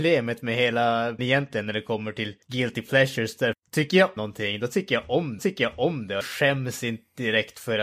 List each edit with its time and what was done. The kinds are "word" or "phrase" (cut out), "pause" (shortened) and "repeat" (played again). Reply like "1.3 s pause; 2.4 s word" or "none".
1.2 s word; 2.4 s pause; 3.5 s word; 4.2 s word; 5.4 s repeat; 6.2 s word